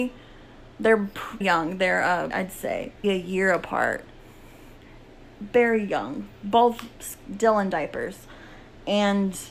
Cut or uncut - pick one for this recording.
cut